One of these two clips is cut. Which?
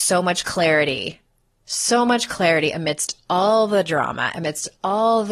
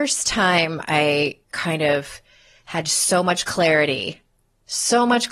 second; 1 cut; at 1.4 s

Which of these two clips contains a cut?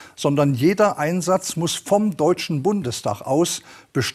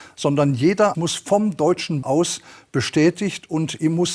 second; 2 cuts; at 0.9 s, 2.0 s

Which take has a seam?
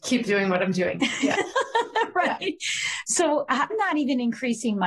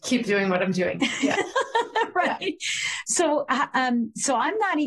first; 1 cut; at 3.7 s

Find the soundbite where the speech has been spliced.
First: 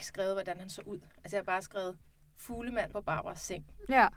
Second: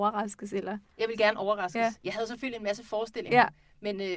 first; 1 cut; at 2.9 s

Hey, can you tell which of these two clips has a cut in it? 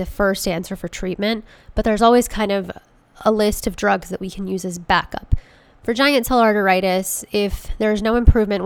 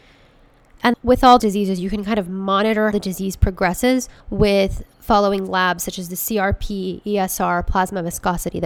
second; 4 cuts; at 0.9 s, 1.4 s, 2.9 s, 4.2 s

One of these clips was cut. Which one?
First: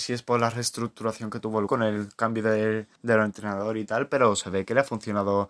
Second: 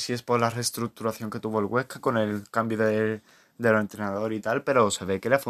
first; 2 cuts; at 1.7 s, 2.9 s

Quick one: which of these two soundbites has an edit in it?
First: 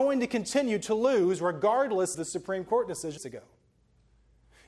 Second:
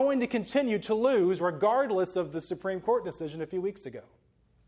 first; 2 cuts; at 2.1 s, 3.2 s

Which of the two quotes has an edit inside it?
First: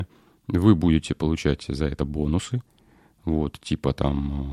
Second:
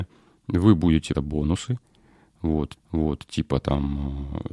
second; 2 cuts; at 1.1 s, 2.8 s

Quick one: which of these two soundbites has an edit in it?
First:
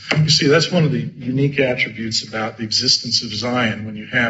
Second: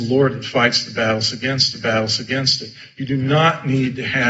second; 1 cut; at 1.7 s

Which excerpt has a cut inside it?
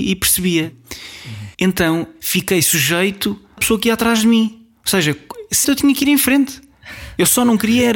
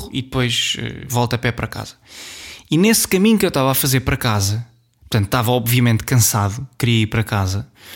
first; 3 cuts; at 1.5 s, 3.6 s, 5.6 s

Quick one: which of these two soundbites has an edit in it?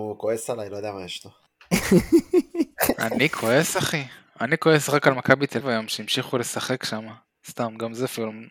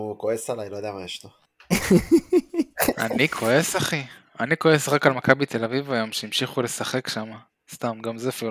first; 1 cut; at 5.6 s

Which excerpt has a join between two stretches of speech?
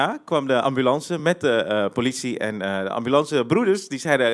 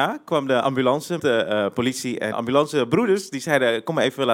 second; 2 cuts; at 1.2 s, 2.3 s

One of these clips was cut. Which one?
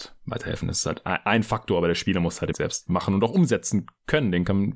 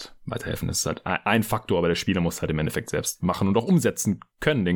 first; 1 cut; at 2.5 s

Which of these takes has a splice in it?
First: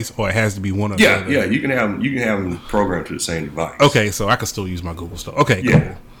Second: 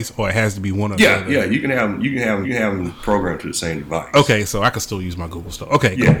second; 1 cut; at 2.4 s

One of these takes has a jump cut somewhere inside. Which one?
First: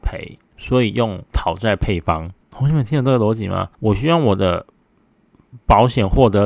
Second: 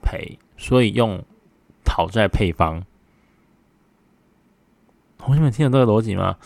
first; 3 cuts; at 1.3 s, 2.4 s, 3.7 s

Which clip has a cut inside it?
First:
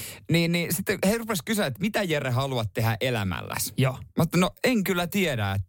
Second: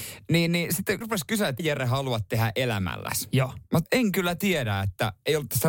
second; 3 cuts; at 1.0 s, 1.6 s, 3.9 s

